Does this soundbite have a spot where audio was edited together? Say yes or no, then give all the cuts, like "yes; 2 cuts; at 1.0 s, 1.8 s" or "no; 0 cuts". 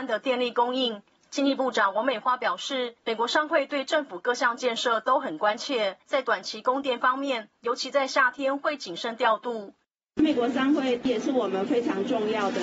no; 0 cuts